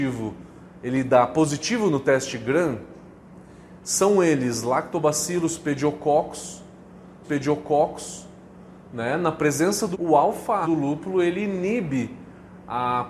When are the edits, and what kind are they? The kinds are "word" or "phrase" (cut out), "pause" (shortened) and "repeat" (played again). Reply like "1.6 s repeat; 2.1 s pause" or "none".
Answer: 7.2 s repeat; 9.9 s word; 10.6 s word